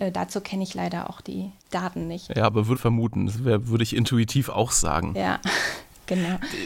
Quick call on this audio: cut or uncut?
cut